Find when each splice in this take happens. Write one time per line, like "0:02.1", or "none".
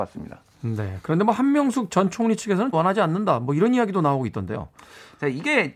0:02.7